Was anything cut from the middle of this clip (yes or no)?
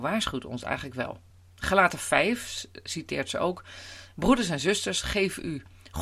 no